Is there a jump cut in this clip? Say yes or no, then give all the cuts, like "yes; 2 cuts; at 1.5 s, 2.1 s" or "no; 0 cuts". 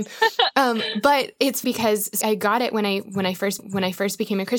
yes; 3 cuts; at 1.6 s, 2.2 s, 3.6 s